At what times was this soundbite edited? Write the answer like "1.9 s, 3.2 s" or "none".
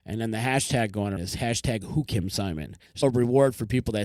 1.2 s, 2.1 s, 3.0 s

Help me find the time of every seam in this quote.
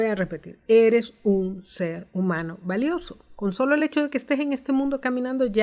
none

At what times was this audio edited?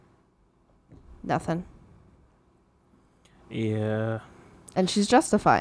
none

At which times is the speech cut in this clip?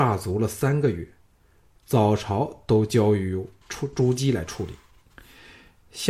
none

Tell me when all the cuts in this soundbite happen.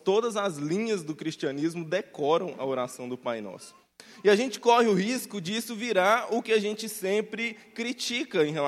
none

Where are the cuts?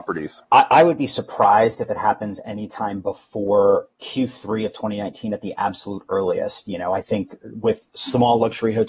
none

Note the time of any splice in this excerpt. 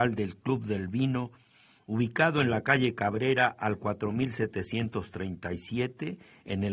none

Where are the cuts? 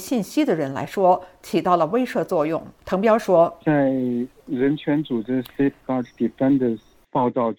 2.8 s

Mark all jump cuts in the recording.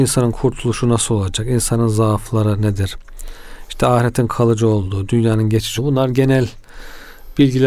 5.8 s

